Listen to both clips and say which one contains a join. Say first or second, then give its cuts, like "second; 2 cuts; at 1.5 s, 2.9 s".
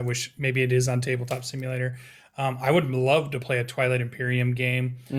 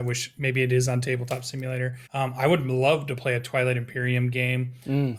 second; 1 cut; at 2.1 s